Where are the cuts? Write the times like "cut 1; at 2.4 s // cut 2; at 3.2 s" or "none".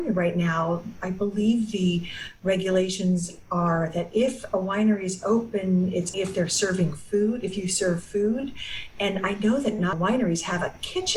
cut 1; at 6.1 s // cut 2; at 9.9 s